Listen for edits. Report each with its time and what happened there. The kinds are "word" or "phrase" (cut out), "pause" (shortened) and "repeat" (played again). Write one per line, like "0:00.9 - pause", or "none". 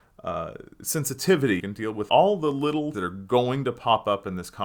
0:01.6 - word
0:02.1 - word
0:02.9 - word